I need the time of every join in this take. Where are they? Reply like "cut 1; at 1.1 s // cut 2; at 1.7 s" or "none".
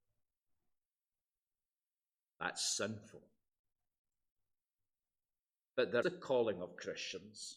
cut 1; at 6.0 s